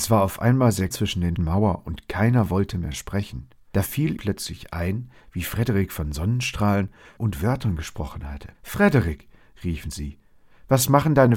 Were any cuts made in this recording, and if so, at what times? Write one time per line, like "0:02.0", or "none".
0:00.9
0:01.4
0:04.2
0:07.2
0:08.5